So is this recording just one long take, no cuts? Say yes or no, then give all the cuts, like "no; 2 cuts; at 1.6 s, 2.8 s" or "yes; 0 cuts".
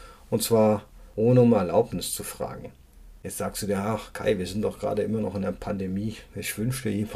yes; 0 cuts